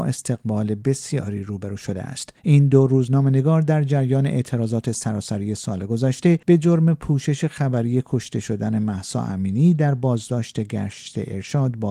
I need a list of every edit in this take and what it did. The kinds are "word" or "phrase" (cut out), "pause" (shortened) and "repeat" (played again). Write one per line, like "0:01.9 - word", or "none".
0:02.4 - pause
0:06.4 - pause